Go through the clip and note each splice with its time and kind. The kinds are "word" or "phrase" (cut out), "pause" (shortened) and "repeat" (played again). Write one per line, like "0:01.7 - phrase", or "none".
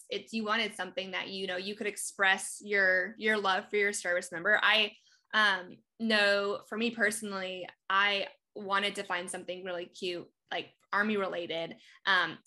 none